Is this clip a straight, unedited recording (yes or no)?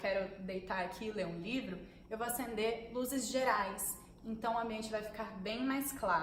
yes